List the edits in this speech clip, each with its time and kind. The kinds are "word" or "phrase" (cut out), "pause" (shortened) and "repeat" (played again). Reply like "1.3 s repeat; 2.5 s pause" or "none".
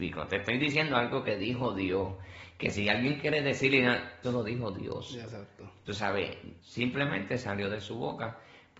4.2 s word; 6.6 s pause

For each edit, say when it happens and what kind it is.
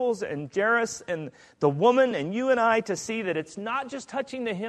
none

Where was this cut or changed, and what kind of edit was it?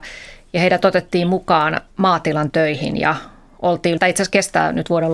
4.0 s word

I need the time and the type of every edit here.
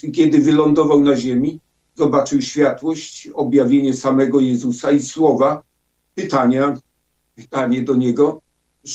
none

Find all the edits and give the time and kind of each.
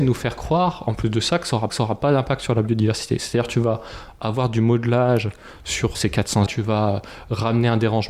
1.7 s repeat; 5.9 s word; 6.5 s word

